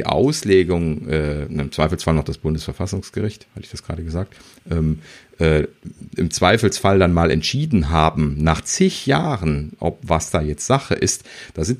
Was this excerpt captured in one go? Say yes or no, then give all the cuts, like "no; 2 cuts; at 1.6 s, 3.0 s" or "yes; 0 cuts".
yes; 0 cuts